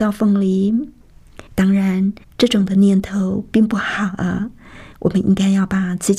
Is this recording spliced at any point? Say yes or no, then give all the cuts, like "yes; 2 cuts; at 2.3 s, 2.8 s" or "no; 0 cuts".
yes; 3 cuts; at 1.5 s, 2.2 s, 4.9 s